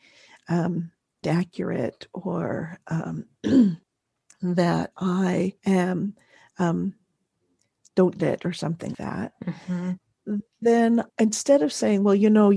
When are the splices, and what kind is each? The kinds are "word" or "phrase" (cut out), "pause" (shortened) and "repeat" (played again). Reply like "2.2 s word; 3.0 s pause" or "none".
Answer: 1.2 s word; 3.8 s pause; 5.6 s pause; 8.2 s word; 8.9 s word; 11.1 s pause